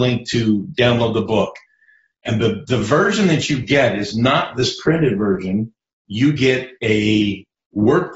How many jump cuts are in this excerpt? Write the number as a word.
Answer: zero